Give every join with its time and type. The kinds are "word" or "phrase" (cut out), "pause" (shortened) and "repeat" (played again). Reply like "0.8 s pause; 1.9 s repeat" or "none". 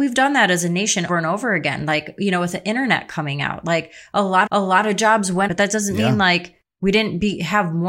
1.1 s word; 4.5 s repeat; 5.5 s word; 6.7 s pause